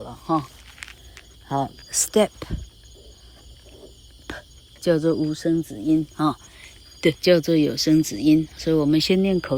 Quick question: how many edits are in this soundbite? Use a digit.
2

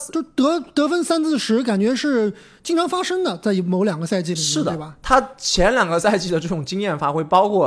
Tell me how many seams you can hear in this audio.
0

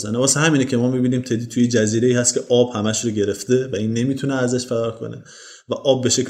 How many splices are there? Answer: 0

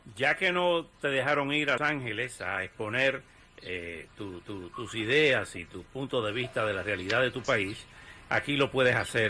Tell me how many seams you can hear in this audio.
2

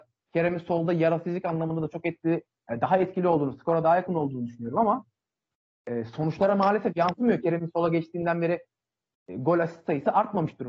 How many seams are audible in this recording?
0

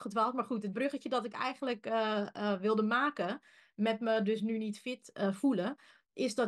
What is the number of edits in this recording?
0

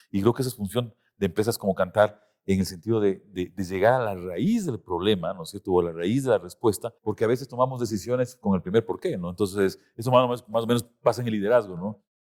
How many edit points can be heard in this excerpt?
1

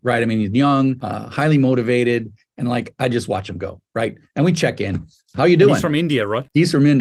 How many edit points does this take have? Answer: 0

